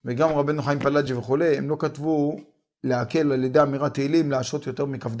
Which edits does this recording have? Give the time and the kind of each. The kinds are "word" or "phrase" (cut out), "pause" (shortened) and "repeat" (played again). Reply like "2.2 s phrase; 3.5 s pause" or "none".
none